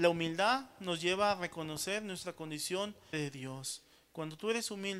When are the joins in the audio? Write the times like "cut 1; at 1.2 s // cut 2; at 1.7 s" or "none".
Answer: cut 1; at 3.1 s

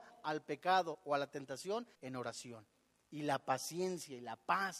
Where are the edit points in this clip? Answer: cut 1; at 1.9 s

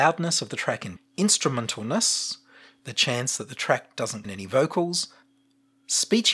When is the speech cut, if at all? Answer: cut 1; at 1.0 s // cut 2; at 4.2 s

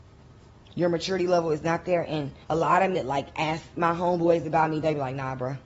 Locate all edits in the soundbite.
cut 1; at 2.4 s // cut 2; at 2.9 s

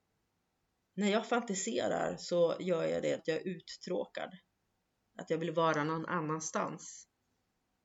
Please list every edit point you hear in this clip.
cut 1; at 3.2 s

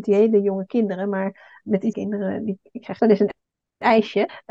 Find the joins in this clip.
cut 1; at 1.6 s // cut 2; at 1.9 s // cut 3; at 3.0 s

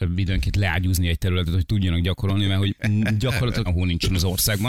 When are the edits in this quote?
cut 1; at 3.7 s

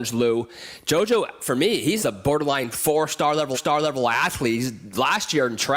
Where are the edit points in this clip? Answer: cut 1; at 2.0 s // cut 2; at 3.5 s

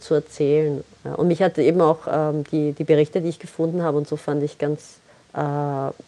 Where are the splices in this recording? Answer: cut 1; at 5.1 s

